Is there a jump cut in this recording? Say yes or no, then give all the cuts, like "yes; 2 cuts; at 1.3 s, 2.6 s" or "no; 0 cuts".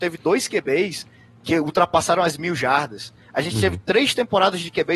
no; 0 cuts